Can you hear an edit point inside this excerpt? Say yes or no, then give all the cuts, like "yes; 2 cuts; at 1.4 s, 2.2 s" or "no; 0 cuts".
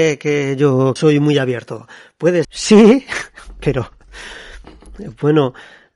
yes; 2 cuts; at 1.0 s, 2.4 s